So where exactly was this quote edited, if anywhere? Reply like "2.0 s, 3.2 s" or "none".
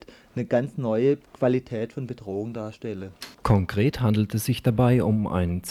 1.3 s, 3.3 s